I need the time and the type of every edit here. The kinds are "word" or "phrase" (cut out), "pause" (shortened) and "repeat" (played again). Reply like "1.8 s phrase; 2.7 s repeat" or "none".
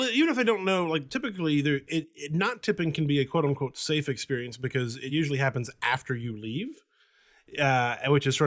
none